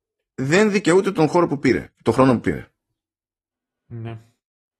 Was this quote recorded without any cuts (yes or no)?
yes